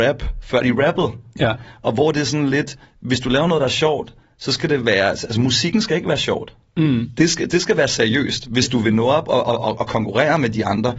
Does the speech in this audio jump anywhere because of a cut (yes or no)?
no